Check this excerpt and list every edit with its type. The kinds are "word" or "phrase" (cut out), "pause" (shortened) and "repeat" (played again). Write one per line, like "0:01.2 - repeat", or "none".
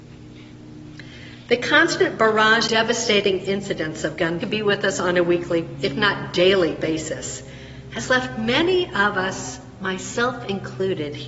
0:02.7 - word
0:04.4 - phrase